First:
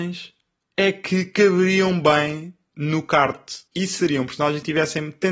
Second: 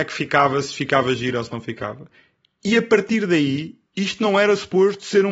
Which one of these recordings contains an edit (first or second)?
first